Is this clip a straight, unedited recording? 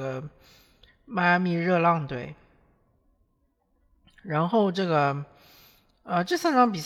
yes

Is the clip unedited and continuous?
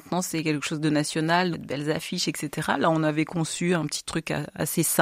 no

